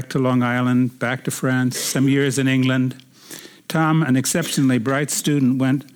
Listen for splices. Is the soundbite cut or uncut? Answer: uncut